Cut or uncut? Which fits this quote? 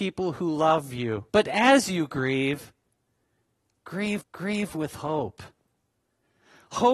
cut